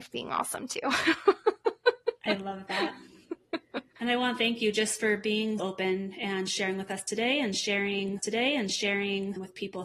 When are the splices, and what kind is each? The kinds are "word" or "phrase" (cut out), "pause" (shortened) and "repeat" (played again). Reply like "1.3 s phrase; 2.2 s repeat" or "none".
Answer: 3.9 s pause; 5.6 s word; 8.2 s repeat